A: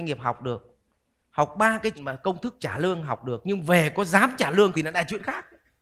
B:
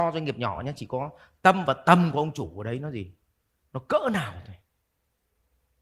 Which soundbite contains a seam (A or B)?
A